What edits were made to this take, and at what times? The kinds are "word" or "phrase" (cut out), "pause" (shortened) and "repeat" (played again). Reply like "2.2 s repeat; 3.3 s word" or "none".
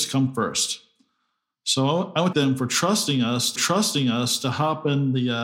2.3 s phrase; 3.6 s repeat